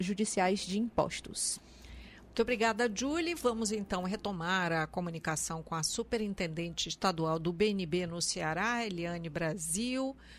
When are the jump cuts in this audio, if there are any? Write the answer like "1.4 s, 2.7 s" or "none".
none